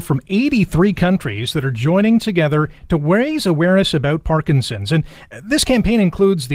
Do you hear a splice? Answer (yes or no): yes